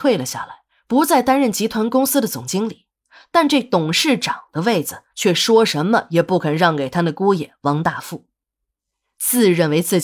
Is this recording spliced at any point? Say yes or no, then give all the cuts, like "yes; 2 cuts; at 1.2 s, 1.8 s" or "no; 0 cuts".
no; 0 cuts